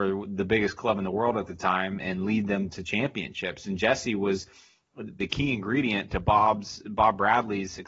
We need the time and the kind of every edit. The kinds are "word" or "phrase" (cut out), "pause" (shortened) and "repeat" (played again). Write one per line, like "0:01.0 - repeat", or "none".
0:05.2 - word